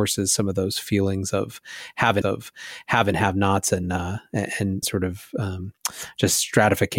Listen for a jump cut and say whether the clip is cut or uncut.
cut